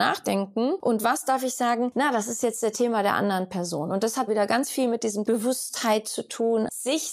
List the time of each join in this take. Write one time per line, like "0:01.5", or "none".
0:04.3
0:05.2